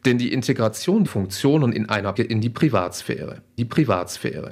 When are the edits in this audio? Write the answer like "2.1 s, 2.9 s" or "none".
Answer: 1.1 s, 2.2 s, 3.6 s